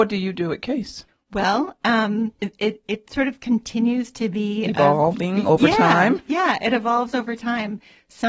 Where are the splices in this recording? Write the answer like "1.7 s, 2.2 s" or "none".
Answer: 1.1 s, 2.4 s